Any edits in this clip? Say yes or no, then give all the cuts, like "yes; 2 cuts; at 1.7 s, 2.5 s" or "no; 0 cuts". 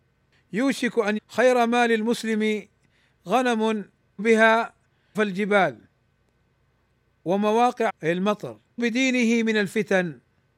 yes; 5 cuts; at 1.2 s, 4.2 s, 5.1 s, 7.9 s, 8.8 s